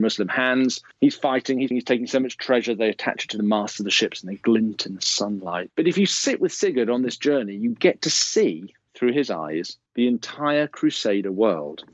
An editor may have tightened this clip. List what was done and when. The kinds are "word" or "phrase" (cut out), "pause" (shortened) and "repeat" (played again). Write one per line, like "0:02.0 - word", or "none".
0:00.9 - pause
0:01.7 - word
0:05.7 - word
0:09.9 - pause